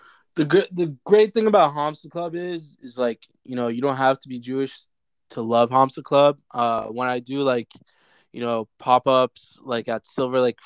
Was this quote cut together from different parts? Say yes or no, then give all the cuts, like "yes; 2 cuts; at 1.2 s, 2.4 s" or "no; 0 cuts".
no; 0 cuts